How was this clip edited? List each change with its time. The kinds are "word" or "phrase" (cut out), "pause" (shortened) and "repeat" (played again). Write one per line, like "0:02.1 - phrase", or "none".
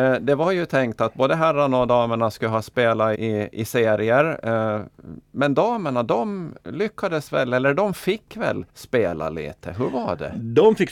0:03.1 - word
0:06.6 - pause
0:08.7 - pause